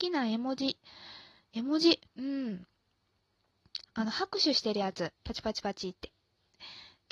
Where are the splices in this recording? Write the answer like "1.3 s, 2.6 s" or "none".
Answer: 2.1 s, 5.2 s